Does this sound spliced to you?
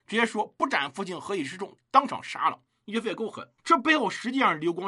yes; 1 cut; at 3.6 s

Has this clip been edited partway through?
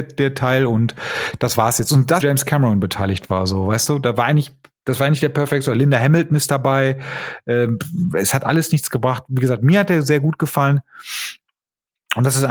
yes; 1 cut; at 2.2 s

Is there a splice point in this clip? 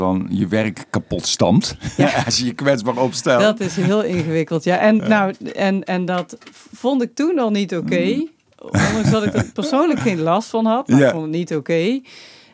no; 0 cuts

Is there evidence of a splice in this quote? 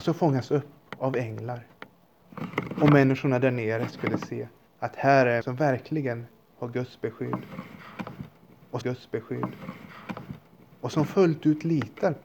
yes; 3 cuts; at 4.7 s, 5.4 s, 8.8 s

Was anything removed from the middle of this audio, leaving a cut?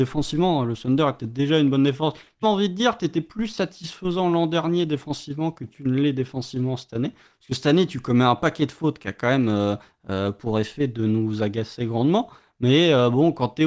yes; 1 cut; at 2.4 s

